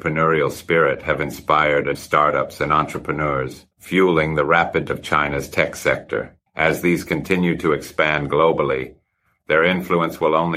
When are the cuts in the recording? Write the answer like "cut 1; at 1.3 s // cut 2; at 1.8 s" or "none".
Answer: cut 1; at 1.9 s // cut 2; at 3.7 s // cut 3; at 4.9 s // cut 4; at 6.5 s // cut 5; at 7.0 s